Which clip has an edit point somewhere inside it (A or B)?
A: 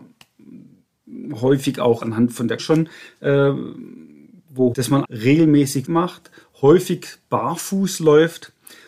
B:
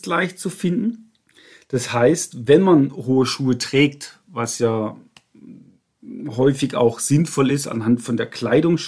A